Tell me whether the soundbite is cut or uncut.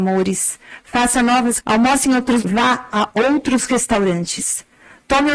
cut